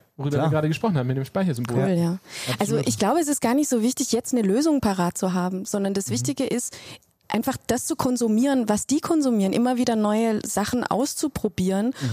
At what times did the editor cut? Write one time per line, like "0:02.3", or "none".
none